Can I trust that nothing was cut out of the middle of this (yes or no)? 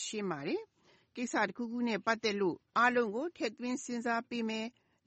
no